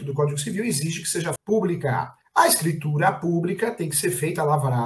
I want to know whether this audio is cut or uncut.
cut